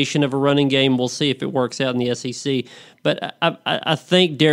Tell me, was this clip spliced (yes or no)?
no